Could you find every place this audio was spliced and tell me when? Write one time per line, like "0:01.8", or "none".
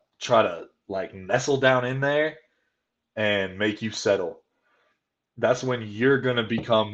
none